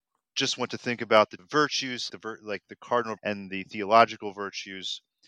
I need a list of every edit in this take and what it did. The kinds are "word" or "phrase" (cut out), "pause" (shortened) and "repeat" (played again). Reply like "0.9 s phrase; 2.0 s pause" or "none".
1.4 s phrase; 2.1 s word; 3.2 s word